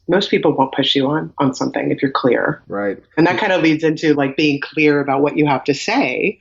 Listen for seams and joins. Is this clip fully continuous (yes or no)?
yes